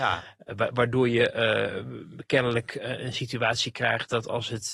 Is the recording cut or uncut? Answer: uncut